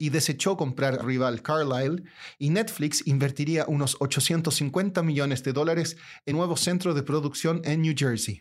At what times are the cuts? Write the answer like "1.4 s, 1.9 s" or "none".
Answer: 1.0 s, 6.3 s